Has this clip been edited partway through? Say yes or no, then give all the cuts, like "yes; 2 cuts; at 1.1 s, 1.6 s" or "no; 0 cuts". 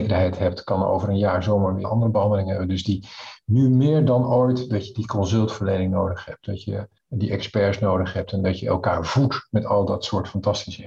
yes; 2 cuts; at 1.8 s, 7.0 s